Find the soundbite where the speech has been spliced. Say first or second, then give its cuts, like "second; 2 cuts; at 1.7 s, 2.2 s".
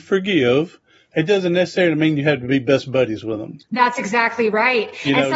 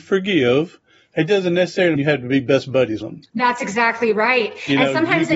second; 2 cuts; at 2.0 s, 3.0 s